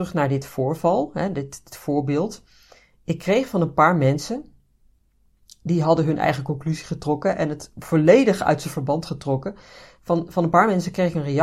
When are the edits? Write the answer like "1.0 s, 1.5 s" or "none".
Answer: none